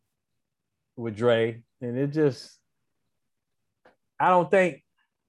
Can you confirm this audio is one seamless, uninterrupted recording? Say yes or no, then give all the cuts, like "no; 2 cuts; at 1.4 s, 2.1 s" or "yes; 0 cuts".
yes; 0 cuts